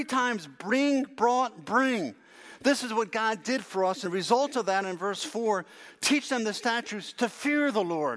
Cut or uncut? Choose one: cut